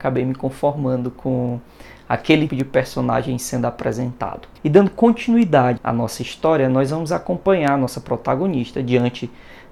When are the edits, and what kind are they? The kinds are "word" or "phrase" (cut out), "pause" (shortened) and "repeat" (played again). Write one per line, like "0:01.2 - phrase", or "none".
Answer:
0:02.5 - word
0:04.6 - pause
0:05.8 - word